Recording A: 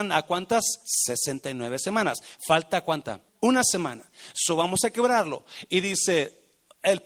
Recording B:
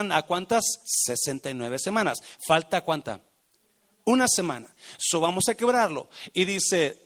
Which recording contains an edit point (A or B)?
A